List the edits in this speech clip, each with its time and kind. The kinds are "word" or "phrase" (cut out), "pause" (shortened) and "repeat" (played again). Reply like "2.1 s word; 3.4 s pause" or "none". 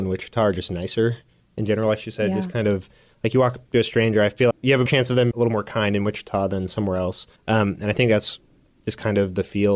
4.5 s word; 4.9 s word; 5.3 s word; 7.4 s pause